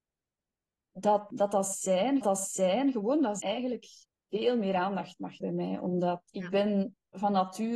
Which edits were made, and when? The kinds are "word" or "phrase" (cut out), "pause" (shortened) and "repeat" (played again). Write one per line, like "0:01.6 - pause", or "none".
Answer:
0:01.3 - word
0:02.2 - repeat
0:03.4 - word
0:04.0 - pause
0:05.4 - word